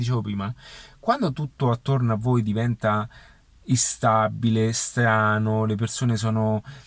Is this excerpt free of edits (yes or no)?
yes